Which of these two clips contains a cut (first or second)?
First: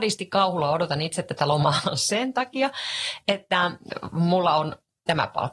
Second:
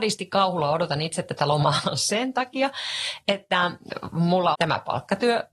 second